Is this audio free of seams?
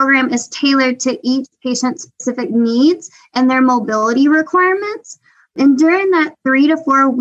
yes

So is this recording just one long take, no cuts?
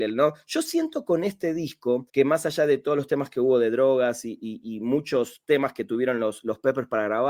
no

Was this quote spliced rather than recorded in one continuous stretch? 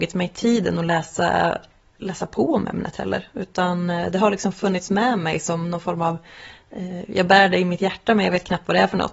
no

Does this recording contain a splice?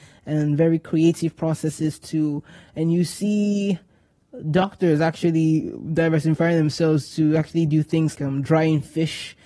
yes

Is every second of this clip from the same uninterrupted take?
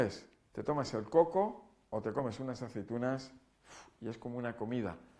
yes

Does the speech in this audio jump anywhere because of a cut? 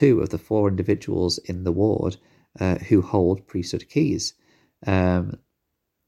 no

